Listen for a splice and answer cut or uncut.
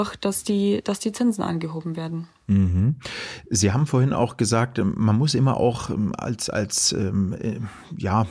uncut